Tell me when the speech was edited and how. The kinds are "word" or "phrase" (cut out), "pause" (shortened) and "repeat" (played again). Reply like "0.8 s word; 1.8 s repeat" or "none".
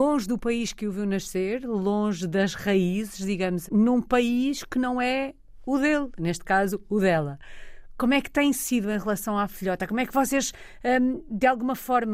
3.7 s word

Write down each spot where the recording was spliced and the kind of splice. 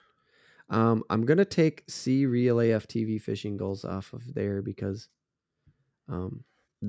none

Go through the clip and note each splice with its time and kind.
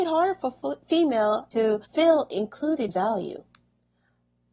1.5 s word; 1.9 s pause; 2.9 s word

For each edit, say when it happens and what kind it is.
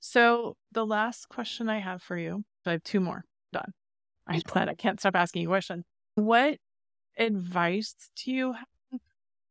2.6 s word; 3.5 s phrase; 4.4 s word

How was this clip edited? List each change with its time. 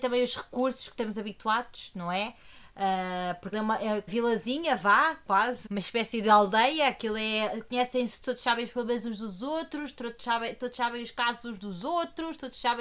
3.5 s word; 4.1 s word; 5.7 s word; 8.2 s word

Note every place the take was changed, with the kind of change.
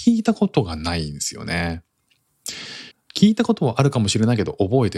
2.9 s pause

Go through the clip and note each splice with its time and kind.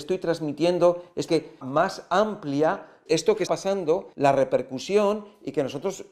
1.3 s word; 1.6 s phrase; 3.1 s word; 3.5 s word; 4.1 s pause

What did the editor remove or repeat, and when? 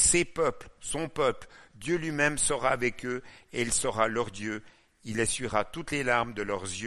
none

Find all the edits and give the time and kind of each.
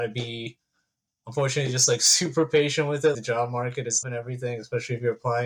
3.1 s word; 4.0 s word

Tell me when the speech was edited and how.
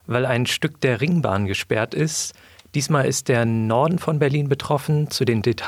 none

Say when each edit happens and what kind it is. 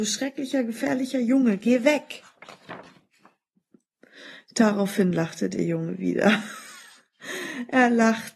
none

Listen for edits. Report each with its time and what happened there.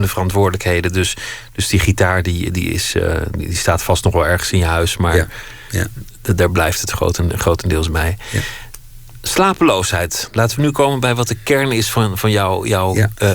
none

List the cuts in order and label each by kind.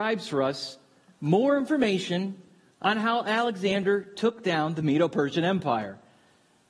none

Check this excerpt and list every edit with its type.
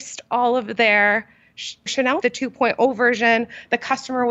1.9 s word; 2.2 s phrase

